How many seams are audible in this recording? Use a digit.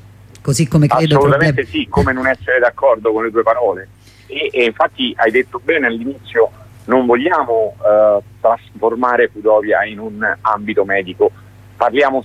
0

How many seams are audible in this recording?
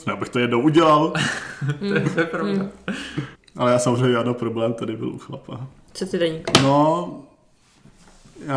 1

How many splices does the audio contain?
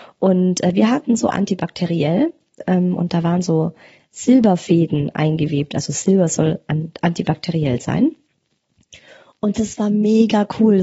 1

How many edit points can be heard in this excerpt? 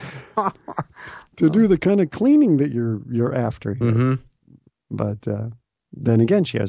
0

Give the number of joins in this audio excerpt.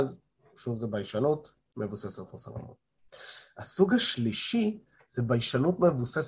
0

